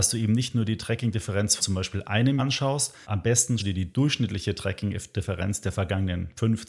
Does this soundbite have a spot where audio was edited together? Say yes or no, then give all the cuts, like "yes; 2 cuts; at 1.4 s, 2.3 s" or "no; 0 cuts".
yes; 4 cuts; at 1.6 s, 2.4 s, 3.0 s, 3.6 s